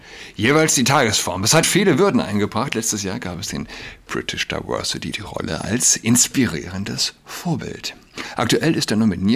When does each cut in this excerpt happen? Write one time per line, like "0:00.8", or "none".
0:01.6
0:05.1